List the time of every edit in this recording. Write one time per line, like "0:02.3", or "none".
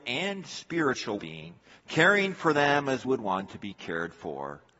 0:01.2
0:01.6
0:03.0